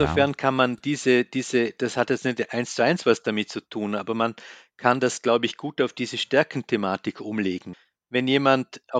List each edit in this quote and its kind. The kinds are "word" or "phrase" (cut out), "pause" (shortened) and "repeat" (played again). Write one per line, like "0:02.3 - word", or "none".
none

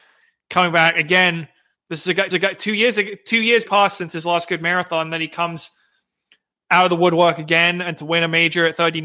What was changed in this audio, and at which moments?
0:02.3 - repeat
0:03.7 - word

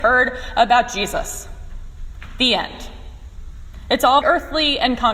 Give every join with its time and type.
0:04.2 - word

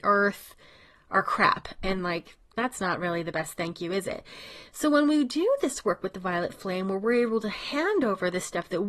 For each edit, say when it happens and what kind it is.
0:02.4 - pause

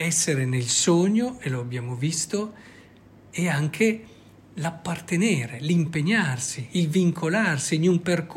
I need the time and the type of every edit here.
none

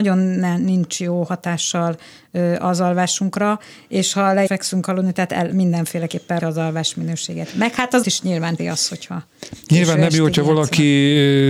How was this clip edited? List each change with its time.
0:04.5 - word
0:06.4 - word
0:08.0 - phrase
0:08.6 - word

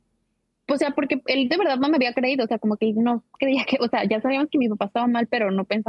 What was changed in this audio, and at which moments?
none

